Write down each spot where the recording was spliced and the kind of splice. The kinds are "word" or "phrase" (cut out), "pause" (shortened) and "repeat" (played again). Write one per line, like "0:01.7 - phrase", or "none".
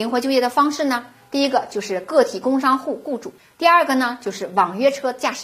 none

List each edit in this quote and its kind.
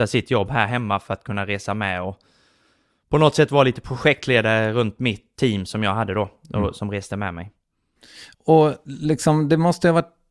0:05.3 - word
0:08.3 - pause

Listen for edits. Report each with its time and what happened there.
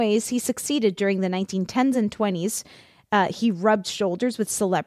none

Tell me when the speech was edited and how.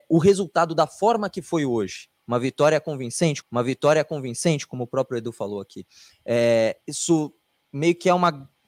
0:03.4 - repeat
0:06.8 - pause

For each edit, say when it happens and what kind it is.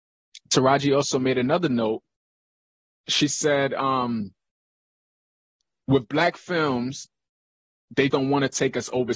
0:08.1 - word

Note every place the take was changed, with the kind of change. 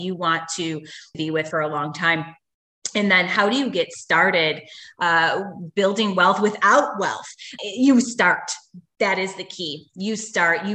0:01.1 - word
0:01.5 - word
0:07.6 - word

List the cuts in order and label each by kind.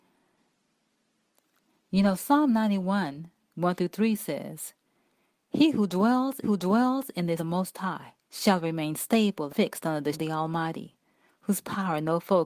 0:06.4 - repeat
0:07.4 - phrase
0:08.2 - pause
0:09.5 - word
0:10.1 - word

